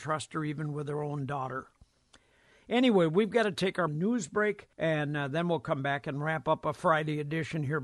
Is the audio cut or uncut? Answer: cut